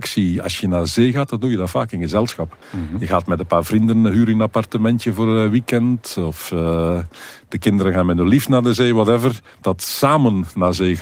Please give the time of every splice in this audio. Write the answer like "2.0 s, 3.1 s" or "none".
2.6 s